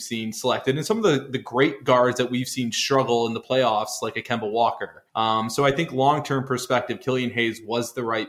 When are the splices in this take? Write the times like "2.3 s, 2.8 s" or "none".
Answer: 5.1 s